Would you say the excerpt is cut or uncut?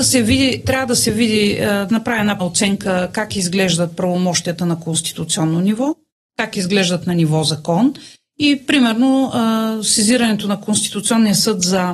cut